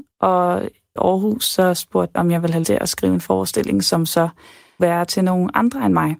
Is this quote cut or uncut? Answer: cut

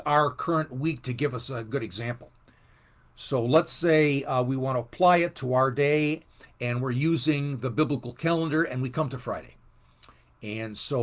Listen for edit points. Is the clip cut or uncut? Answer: uncut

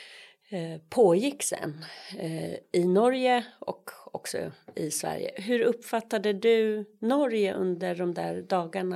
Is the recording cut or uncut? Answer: uncut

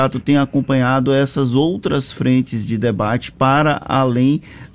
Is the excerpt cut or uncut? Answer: uncut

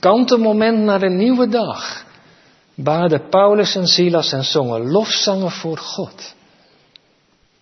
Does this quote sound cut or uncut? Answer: uncut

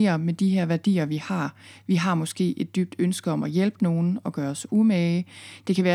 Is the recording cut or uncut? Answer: uncut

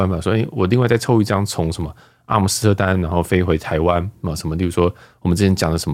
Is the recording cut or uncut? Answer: uncut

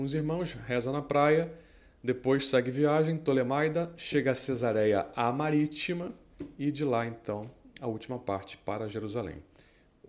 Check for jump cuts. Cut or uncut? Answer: uncut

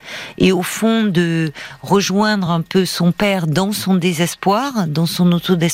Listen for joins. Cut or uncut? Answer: uncut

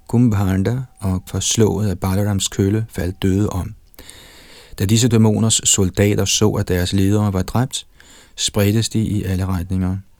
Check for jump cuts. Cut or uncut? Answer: cut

